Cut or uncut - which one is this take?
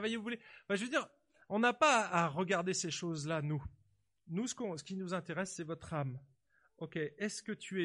uncut